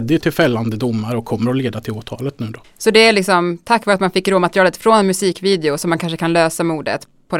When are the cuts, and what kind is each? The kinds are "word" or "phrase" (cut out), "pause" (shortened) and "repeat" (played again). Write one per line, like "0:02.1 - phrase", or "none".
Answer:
0:02.6 - pause

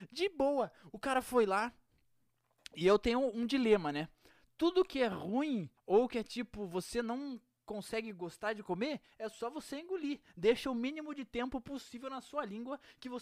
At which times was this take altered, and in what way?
0:05.8 - pause

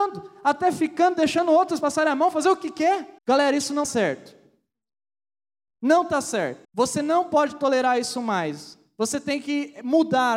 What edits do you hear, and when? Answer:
0:01.8 - word
0:03.2 - pause
0:03.8 - word
0:06.6 - pause

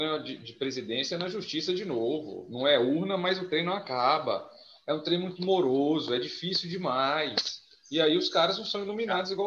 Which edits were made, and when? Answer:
none

